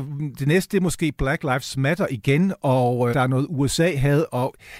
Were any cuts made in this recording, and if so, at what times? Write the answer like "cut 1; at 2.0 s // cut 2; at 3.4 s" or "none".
cut 1; at 3.1 s

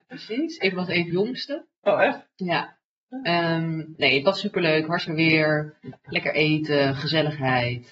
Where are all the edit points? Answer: cut 1; at 1.1 s // cut 2; at 4.0 s // cut 3; at 5.1 s

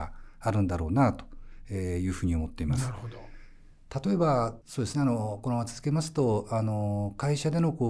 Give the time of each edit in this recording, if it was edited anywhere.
cut 1; at 4.6 s

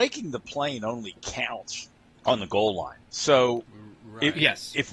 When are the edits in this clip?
cut 1; at 2.1 s // cut 2; at 3.0 s

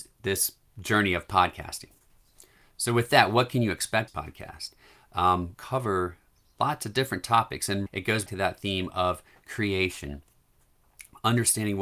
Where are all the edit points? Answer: cut 1; at 4.1 s // cut 2; at 5.5 s // cut 3; at 7.9 s // cut 4; at 8.3 s

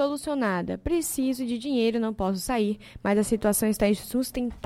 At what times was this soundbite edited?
none

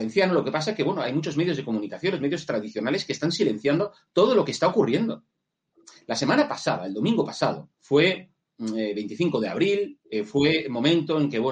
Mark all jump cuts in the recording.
cut 1; at 7.7 s // cut 2; at 10.0 s

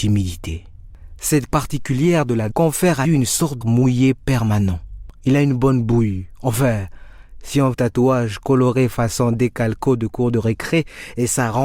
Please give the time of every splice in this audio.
cut 1; at 1.5 s // cut 2; at 2.5 s // cut 3; at 3.0 s // cut 4; at 3.6 s // cut 5; at 7.7 s

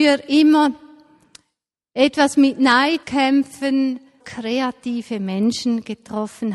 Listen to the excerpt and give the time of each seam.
cut 1; at 3.0 s // cut 2; at 4.2 s

